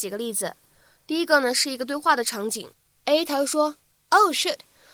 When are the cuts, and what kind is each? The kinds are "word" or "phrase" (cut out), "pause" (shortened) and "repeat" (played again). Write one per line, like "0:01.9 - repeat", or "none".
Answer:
none